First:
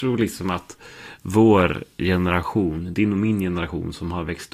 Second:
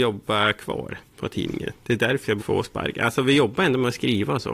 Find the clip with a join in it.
second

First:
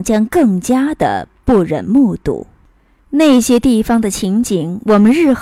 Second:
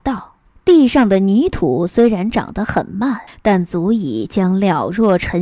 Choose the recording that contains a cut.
second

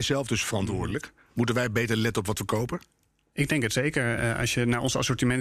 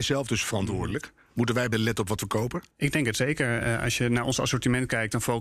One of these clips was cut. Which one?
second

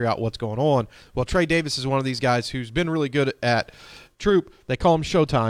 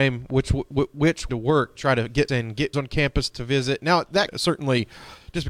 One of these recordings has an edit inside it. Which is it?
second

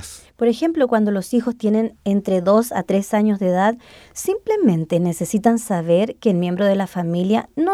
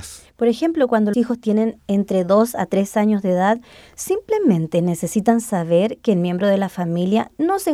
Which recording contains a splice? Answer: second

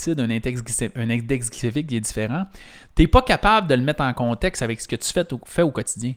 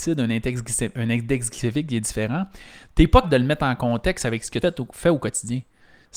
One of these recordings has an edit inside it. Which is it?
second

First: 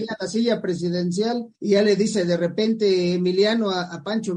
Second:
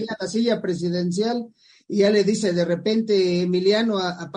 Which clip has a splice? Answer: first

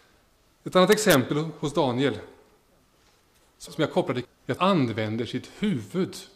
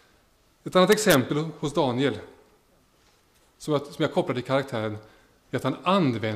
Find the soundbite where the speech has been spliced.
first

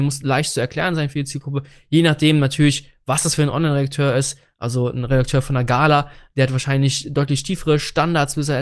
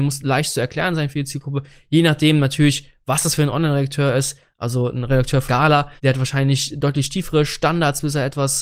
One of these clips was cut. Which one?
second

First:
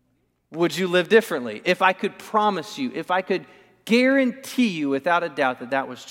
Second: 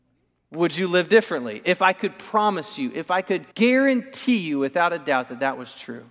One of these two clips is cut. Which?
second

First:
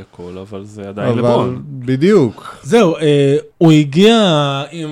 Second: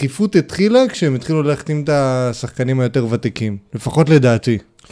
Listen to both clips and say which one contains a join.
first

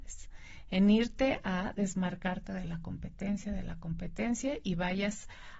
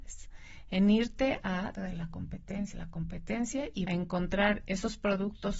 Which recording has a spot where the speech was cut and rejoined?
second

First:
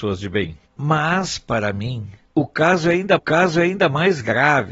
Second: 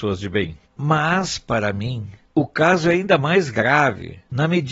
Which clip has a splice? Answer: first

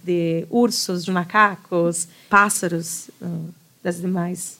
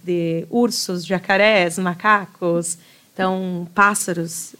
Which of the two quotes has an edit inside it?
first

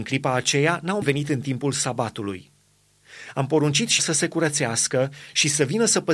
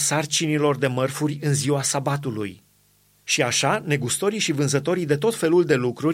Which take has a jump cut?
first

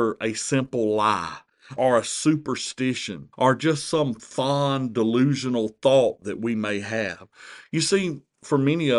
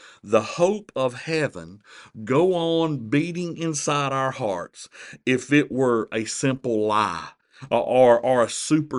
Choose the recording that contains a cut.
first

